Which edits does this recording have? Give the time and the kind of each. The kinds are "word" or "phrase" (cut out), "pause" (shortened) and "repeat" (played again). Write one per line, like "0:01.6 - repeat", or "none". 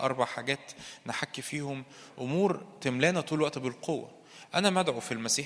none